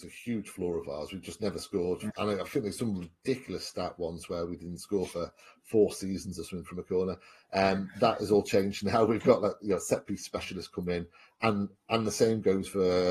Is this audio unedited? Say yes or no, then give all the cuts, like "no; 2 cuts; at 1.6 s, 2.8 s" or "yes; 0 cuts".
yes; 0 cuts